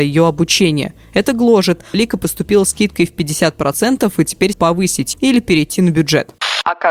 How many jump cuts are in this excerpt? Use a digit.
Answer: 4